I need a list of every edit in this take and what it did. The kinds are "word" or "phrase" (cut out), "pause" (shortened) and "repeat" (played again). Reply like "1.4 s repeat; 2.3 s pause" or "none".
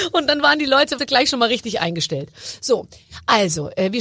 1.0 s word